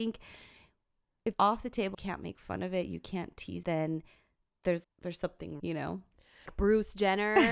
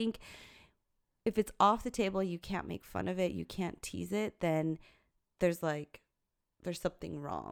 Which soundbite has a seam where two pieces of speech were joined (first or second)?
first